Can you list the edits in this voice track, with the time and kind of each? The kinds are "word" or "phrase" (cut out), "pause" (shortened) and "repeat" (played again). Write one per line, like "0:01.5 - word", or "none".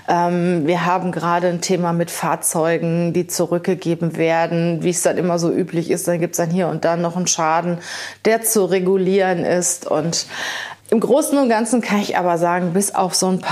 0:10.8 - pause